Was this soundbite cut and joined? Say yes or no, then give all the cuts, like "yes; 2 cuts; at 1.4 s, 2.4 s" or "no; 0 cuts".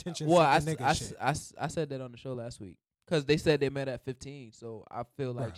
no; 0 cuts